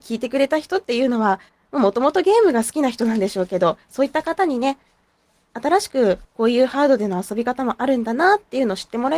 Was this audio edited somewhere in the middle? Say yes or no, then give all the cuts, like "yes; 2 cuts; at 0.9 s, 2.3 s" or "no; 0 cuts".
yes; 3 cuts; at 1.5 s, 3.8 s, 6.2 s